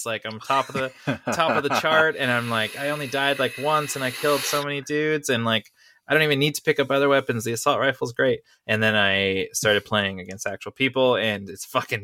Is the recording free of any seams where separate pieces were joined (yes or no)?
yes